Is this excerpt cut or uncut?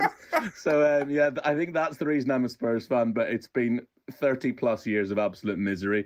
uncut